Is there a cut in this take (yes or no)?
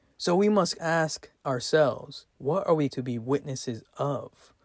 yes